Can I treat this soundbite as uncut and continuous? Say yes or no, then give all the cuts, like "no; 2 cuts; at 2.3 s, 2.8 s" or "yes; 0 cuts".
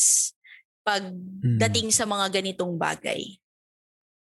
yes; 0 cuts